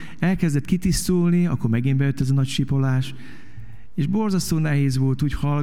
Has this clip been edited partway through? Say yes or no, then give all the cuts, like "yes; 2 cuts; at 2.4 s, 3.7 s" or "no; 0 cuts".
no; 0 cuts